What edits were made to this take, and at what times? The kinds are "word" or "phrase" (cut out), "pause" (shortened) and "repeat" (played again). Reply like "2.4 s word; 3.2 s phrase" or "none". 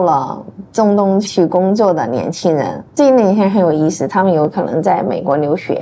2.9 s pause

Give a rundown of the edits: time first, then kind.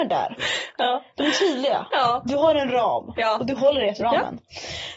4.0 s word

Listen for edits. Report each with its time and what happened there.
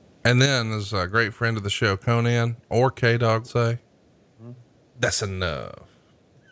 3.4 s word

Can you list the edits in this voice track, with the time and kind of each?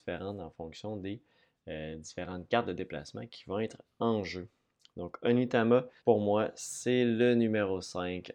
6.0 s pause

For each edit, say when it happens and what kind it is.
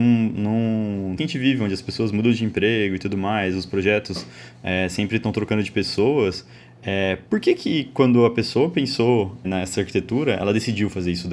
1.2 s word; 7.3 s pause; 9.4 s word

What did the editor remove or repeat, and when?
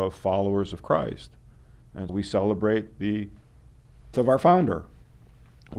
2.1 s word; 4.1 s word

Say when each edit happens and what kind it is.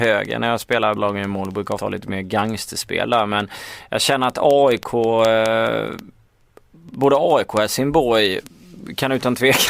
1.0 s word; 1.8 s word

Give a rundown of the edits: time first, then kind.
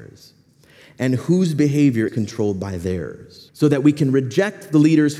2.1 s word; 3.5 s pause

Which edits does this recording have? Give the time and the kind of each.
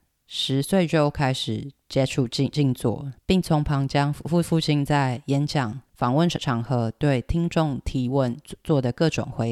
none

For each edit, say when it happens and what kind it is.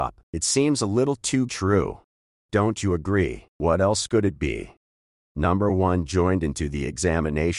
1.5 s phrase

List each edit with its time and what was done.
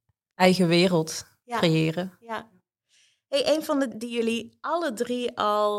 3.9 s word

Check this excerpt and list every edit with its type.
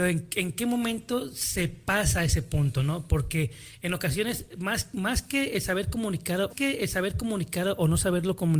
6.5 s repeat

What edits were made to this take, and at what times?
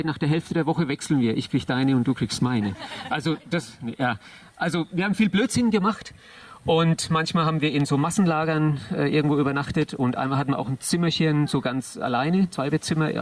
none

